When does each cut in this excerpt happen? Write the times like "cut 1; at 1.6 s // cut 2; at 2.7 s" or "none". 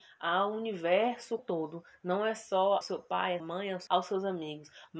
cut 1; at 1.4 s // cut 2; at 2.8 s // cut 3; at 3.4 s // cut 4; at 3.9 s